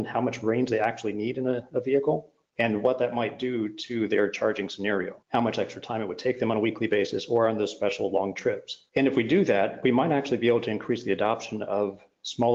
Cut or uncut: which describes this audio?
cut